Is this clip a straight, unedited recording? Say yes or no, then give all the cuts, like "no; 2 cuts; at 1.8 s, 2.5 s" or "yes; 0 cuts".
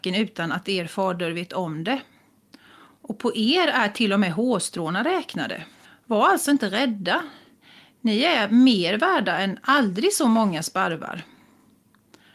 no; 1 cut; at 5.8 s